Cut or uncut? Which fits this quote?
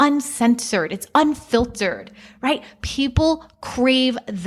uncut